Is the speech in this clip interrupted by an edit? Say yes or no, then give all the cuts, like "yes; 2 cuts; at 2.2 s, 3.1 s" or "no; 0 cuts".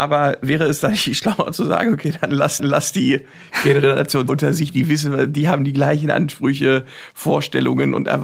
yes; 2 cuts; at 2.6 s, 4.3 s